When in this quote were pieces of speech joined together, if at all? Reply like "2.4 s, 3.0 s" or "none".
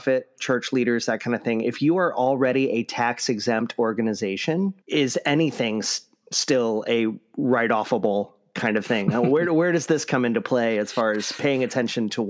4.8 s